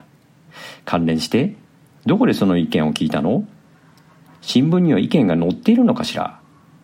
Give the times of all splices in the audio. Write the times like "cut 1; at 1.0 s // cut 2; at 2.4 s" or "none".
cut 1; at 1.6 s